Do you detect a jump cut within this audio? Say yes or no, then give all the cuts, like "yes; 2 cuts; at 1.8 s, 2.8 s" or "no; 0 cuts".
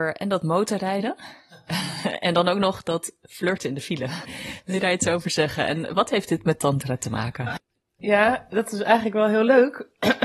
no; 0 cuts